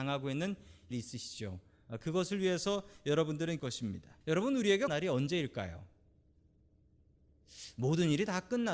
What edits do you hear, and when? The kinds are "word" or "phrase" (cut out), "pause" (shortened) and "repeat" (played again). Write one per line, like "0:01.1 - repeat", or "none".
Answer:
0:00.9 - phrase
0:03.6 - word
0:04.2 - pause
0:04.9 - phrase

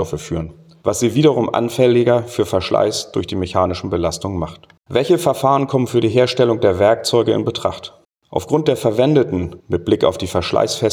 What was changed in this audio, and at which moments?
0:04.8 - pause
0:08.0 - pause
0:09.6 - pause

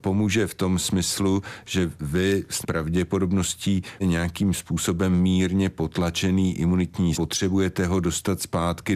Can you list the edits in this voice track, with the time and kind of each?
0:02.6 - word
0:04.0 - word
0:07.1 - word

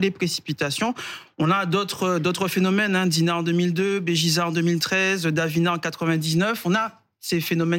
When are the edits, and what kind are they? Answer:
none

